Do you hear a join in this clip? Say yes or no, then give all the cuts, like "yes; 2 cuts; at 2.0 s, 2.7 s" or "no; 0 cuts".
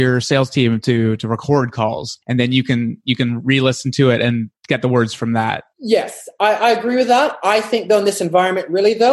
yes; 3 cuts; at 2.2 s, 4.6 s, 5.7 s